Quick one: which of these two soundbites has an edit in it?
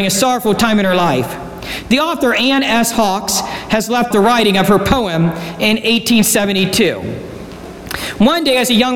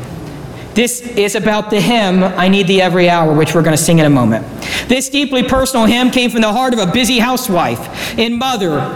first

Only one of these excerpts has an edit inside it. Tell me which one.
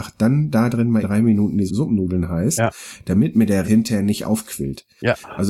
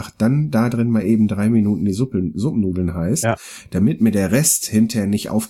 first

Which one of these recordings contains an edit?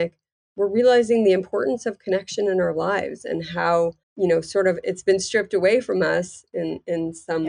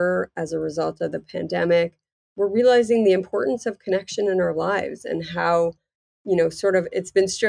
first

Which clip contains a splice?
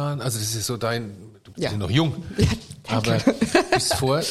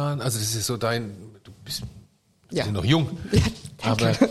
first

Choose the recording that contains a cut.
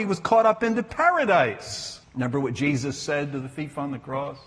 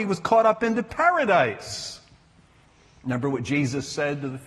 first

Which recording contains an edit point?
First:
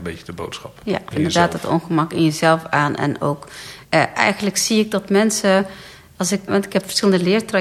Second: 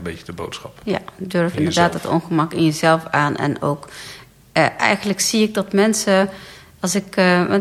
first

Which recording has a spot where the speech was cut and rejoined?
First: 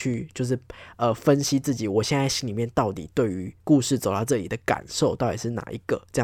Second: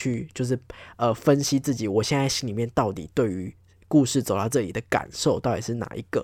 first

